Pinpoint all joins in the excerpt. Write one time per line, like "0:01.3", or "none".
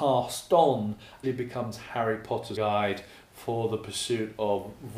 0:01.2
0:02.6